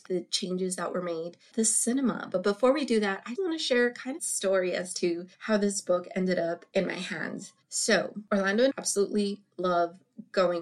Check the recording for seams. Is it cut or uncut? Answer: cut